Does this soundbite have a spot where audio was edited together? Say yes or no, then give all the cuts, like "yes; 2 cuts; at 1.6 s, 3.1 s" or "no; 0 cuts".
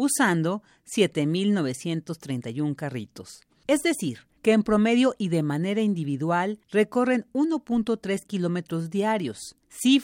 no; 0 cuts